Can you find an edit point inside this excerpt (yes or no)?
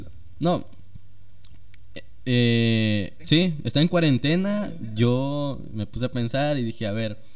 yes